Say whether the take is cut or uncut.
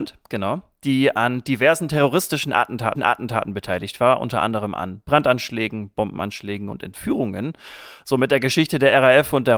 cut